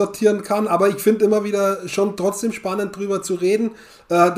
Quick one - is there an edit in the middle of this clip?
no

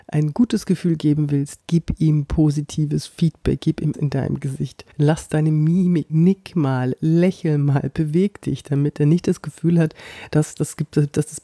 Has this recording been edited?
yes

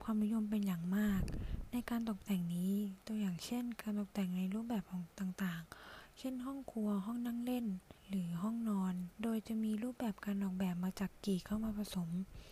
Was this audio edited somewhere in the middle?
yes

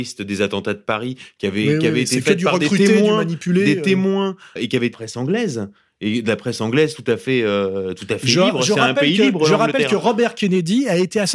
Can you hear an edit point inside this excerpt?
yes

